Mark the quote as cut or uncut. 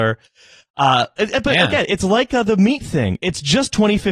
uncut